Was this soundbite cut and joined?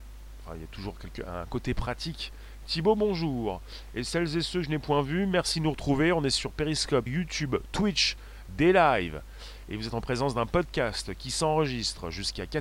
yes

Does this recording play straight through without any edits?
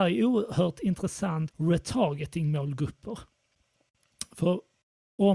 no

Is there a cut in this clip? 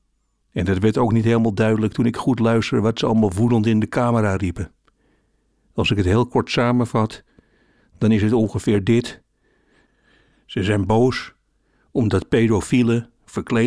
no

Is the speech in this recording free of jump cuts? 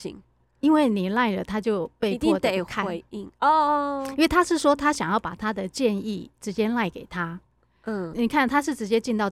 no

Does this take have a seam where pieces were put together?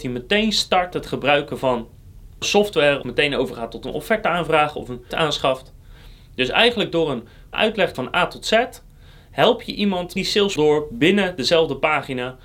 yes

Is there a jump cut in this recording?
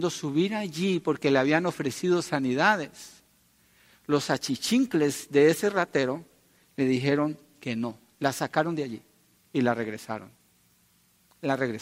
no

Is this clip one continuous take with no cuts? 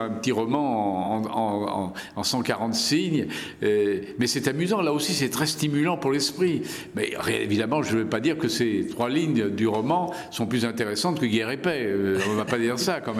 yes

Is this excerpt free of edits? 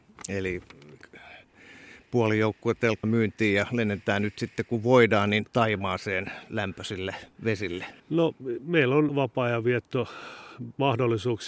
no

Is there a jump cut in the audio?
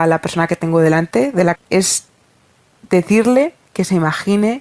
yes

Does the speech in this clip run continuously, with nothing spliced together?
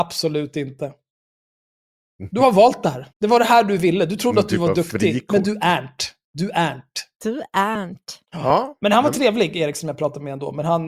no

